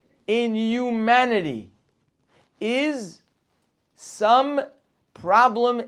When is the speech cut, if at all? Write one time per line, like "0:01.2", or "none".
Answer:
none